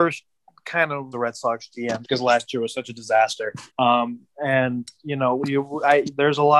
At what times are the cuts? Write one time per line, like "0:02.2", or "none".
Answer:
0:01.1
0:02.0
0:03.7